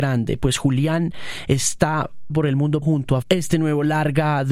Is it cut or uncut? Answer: cut